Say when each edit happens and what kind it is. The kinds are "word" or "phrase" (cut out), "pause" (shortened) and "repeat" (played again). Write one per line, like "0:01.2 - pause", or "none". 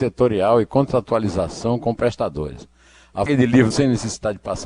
0:03.3 - word
0:03.7 - word